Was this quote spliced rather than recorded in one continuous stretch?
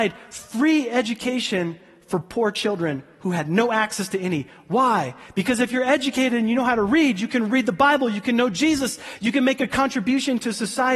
no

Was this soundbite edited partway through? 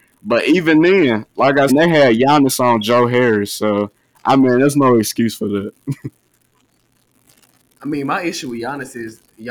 yes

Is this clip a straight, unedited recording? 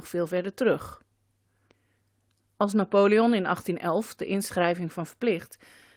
no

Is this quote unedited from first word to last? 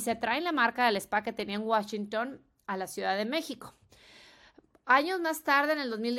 yes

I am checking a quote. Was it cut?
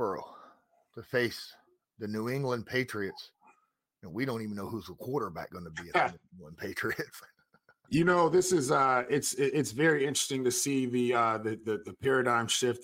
no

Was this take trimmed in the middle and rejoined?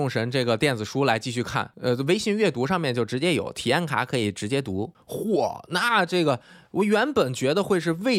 no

